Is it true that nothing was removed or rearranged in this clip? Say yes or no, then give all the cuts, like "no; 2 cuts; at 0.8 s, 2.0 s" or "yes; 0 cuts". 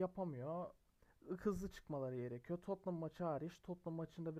yes; 0 cuts